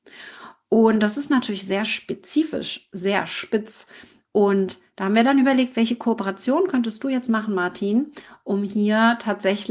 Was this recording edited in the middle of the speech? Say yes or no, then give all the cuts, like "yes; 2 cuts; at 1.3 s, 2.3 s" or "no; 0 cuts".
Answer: no; 0 cuts